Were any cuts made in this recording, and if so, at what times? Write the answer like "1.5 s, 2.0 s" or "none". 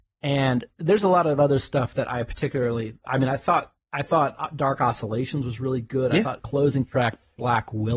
6.4 s